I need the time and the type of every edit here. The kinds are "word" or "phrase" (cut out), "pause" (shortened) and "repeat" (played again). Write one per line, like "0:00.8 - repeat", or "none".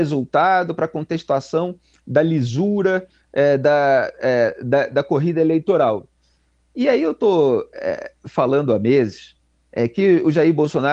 none